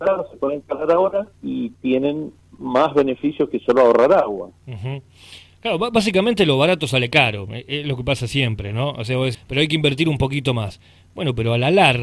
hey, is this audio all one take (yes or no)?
no